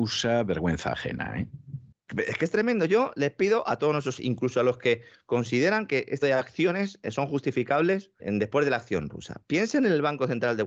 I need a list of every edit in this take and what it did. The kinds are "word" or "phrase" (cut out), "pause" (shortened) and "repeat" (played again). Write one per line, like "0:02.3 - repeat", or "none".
0:04.2 - word
0:06.2 - word
0:08.2 - word